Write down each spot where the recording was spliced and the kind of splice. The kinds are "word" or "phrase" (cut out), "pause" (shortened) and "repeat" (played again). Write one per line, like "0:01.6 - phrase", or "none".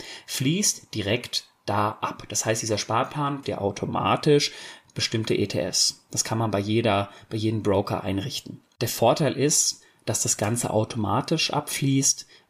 0:03.4 - word